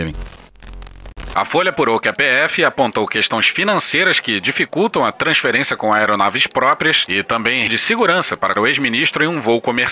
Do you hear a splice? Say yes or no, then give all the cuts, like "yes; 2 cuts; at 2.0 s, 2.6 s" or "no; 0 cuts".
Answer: yes; 2 cuts; at 7.7 s, 8.6 s